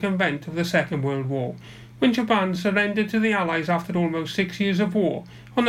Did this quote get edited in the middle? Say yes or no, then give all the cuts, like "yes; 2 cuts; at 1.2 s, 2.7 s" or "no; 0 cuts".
no; 0 cuts